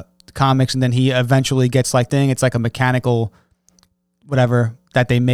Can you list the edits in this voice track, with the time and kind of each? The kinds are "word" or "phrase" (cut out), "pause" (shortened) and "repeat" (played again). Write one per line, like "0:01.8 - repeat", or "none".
0:02.1 - phrase

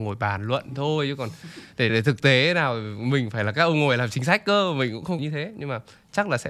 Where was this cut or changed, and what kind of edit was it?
0:01.9 - word
0:05.2 - phrase

